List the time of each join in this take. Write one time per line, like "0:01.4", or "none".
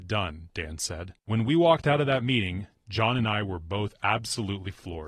0:01.2